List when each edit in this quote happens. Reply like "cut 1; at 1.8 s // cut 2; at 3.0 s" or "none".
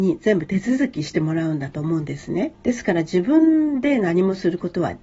cut 1; at 2.5 s